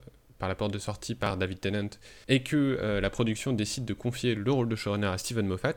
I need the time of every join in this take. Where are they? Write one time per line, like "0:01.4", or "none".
0:02.2